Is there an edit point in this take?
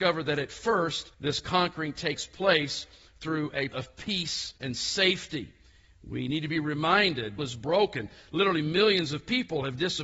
yes; 4 cuts; at 1.1 s, 3.7 s, 4.6 s, 7.4 s

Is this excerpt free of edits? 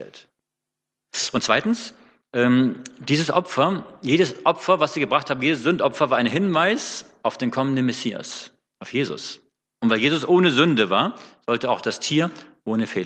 yes; 0 cuts

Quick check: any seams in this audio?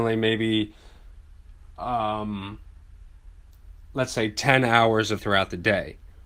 yes; 2 cuts; at 3.8 s, 5.2 s

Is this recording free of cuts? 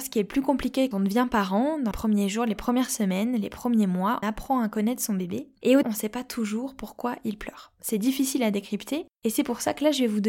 no; 4 cuts; at 0.9 s, 1.9 s, 4.2 s, 5.8 s

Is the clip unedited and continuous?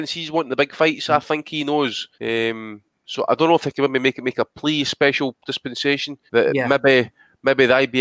no; 2 cuts; at 2.1 s, 6.3 s

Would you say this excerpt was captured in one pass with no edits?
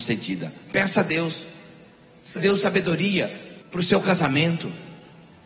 no; 2 cuts; at 2.4 s, 3.6 s

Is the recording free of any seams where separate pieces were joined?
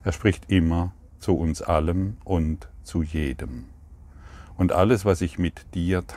yes; 0 cuts

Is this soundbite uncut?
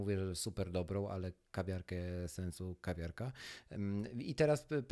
yes; 0 cuts

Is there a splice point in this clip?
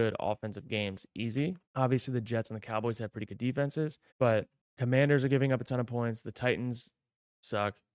yes; 2 cuts; at 1.6 s, 4.1 s

